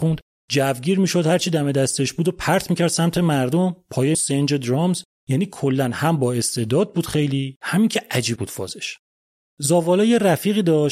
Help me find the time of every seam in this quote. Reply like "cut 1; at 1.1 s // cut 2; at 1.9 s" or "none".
cut 1; at 4.1 s // cut 2; at 8.4 s